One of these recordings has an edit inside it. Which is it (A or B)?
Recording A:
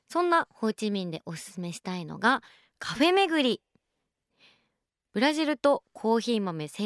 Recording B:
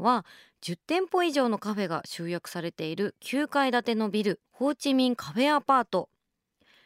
B